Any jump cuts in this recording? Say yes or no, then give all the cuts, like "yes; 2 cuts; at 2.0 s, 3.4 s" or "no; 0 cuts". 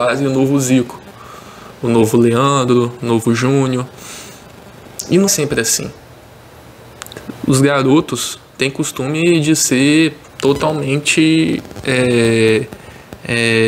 yes; 2 cuts; at 5.3 s, 10.3 s